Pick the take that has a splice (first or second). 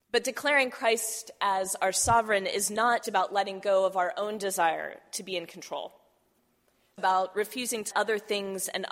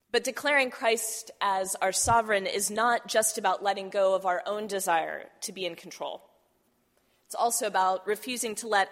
first